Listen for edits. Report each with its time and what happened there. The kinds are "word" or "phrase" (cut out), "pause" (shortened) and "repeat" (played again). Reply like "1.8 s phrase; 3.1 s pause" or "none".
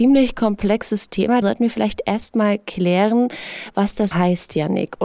1.4 s word; 4.1 s word